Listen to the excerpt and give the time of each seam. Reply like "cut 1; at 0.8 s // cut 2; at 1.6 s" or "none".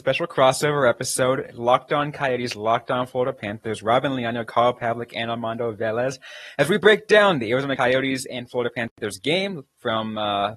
none